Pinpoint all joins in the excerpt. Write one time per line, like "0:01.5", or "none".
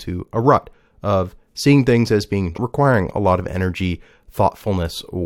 0:02.5